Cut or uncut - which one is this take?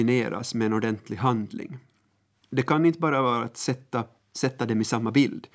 uncut